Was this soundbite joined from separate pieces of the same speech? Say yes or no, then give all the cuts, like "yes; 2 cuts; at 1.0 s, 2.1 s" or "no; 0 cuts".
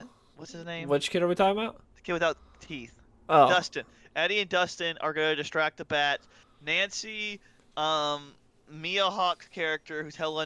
no; 0 cuts